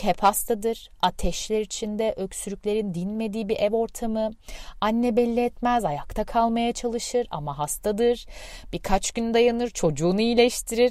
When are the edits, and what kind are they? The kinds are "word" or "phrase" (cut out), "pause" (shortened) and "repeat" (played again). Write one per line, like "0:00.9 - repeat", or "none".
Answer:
none